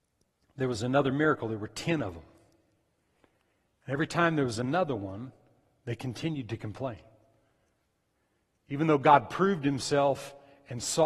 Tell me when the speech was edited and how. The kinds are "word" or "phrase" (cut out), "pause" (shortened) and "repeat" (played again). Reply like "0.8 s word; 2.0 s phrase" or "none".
none